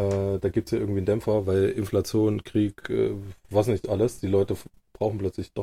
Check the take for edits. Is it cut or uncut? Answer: uncut